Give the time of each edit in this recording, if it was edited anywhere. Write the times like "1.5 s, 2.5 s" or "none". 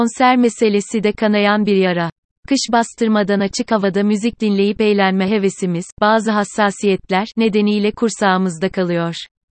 none